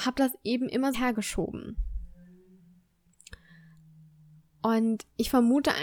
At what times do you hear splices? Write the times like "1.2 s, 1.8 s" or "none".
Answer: 0.9 s